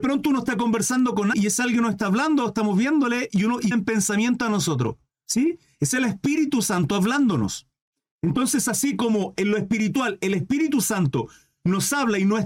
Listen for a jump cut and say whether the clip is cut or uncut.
cut